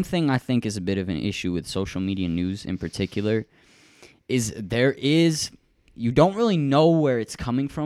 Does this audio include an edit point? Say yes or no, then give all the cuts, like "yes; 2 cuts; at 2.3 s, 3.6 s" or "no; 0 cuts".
no; 0 cuts